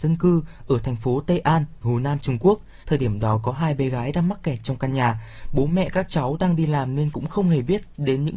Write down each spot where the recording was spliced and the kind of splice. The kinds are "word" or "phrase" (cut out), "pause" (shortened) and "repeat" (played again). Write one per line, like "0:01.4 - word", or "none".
0:01.8 - word
0:02.8 - pause